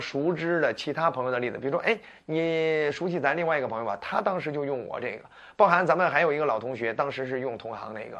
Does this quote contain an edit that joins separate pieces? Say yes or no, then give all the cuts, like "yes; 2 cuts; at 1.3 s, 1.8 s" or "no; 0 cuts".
no; 0 cuts